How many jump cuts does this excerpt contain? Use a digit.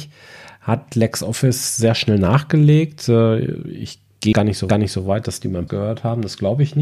3